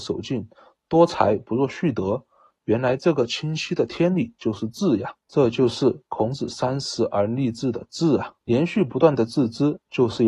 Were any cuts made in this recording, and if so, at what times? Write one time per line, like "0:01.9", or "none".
0:05.2
0:08.4